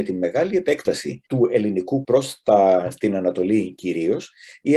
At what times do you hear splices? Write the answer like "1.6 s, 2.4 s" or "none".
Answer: 1.2 s, 2.0 s